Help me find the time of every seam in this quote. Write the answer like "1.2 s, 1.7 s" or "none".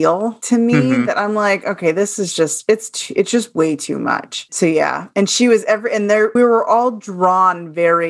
4.5 s, 6.4 s

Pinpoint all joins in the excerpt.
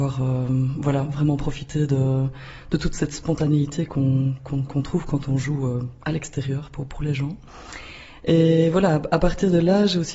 none

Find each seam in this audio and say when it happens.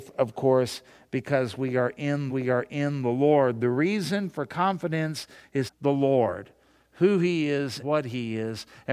2.3 s, 5.7 s, 7.8 s

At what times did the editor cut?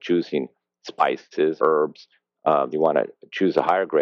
1.6 s, 2.7 s

